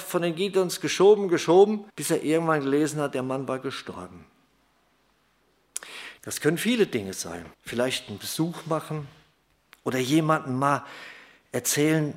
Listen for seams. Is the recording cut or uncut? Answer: cut